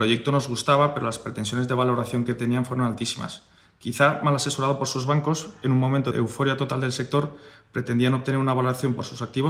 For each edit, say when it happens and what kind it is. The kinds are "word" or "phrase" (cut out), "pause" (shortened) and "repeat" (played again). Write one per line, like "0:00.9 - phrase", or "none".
none